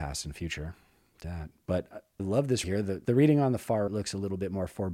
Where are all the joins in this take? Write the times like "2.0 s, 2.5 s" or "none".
1.2 s, 2.2 s, 2.6 s, 3.0 s, 3.9 s